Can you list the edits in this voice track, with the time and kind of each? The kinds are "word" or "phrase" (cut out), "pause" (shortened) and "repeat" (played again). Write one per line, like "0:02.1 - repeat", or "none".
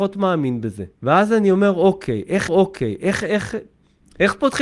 0:00.9 - pause
0:02.5 - repeat

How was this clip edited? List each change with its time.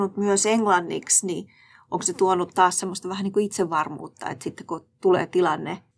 none

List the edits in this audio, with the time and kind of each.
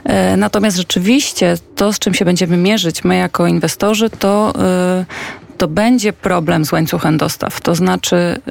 none

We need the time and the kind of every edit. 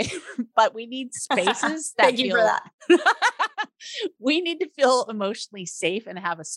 none

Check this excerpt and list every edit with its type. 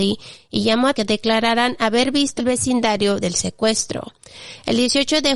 0:00.9 - word
0:02.4 - phrase
0:03.2 - phrase

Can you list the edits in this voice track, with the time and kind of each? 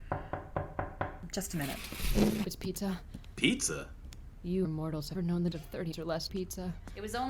0:02.4 - word
0:04.6 - word
0:05.1 - word
0:05.5 - word
0:05.9 - word
0:06.3 - word

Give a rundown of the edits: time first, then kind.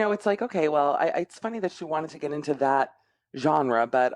none

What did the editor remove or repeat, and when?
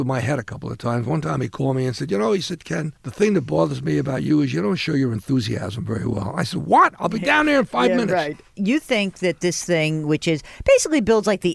0:03.0 - pause

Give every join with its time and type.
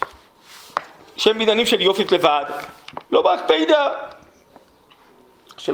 0:02.1 - word
0:03.1 - pause

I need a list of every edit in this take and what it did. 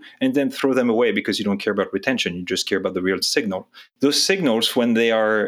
0:03.2 - word

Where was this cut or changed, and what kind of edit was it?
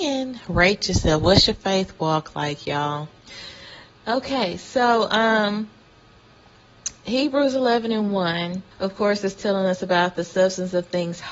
0:08.7 - pause

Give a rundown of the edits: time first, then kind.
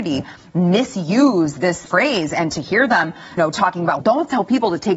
0:01.9 - word
0:03.4 - word
0:04.0 - word

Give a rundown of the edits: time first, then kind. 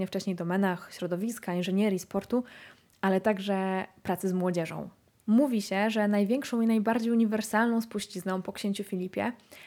none

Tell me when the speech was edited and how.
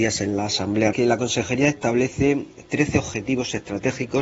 0:00.9 - phrase

